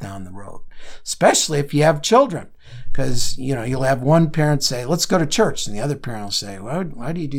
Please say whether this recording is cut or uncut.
uncut